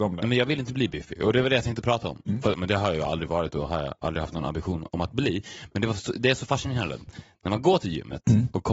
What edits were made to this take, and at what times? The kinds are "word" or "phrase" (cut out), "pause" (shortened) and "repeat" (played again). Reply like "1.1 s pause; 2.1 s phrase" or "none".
none